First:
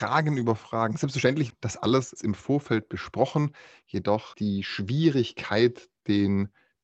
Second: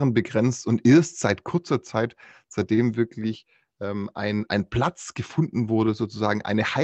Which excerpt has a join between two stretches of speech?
first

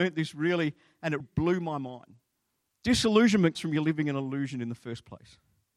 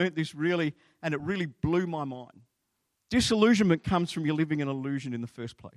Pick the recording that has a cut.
first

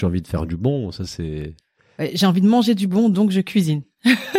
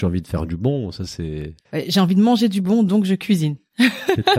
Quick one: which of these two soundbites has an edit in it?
second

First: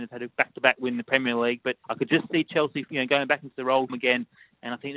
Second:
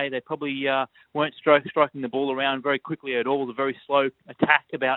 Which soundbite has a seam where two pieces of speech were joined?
first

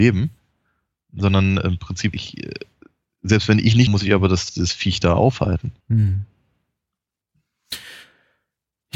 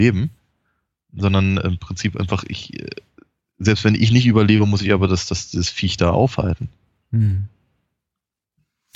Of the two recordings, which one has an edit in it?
first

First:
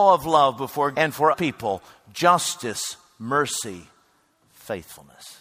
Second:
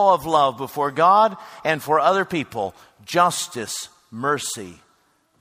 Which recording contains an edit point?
first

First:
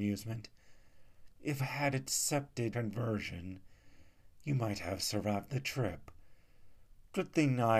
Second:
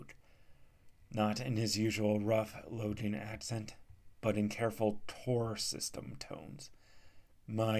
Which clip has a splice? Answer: first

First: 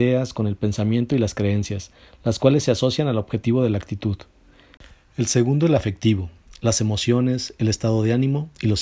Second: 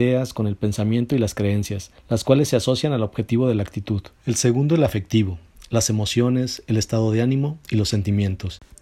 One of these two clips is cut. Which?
second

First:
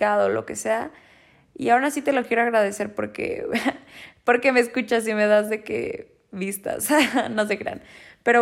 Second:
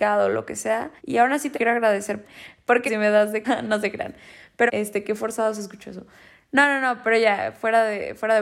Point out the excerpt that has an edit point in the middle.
second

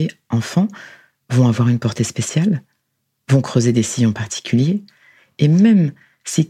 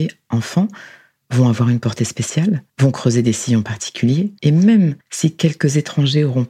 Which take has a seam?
second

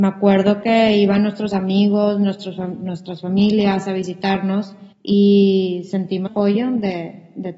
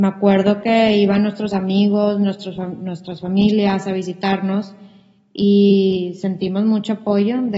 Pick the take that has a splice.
first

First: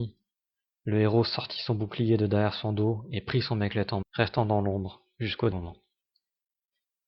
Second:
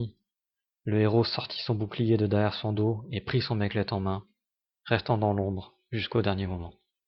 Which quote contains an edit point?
first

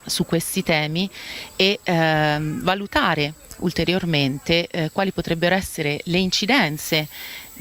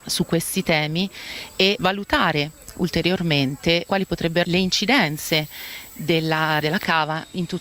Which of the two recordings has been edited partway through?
second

